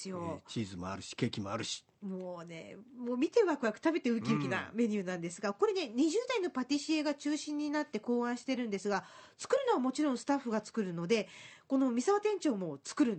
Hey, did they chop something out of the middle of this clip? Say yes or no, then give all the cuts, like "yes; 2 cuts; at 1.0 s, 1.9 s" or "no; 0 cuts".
yes; 1 cut; at 1.9 s